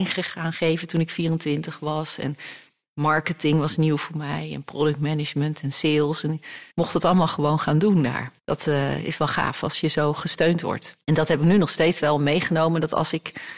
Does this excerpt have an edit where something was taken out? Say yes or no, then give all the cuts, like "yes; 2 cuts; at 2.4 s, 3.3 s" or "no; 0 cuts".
yes; 3 cuts; at 6.7 s, 8.4 s, 11.0 s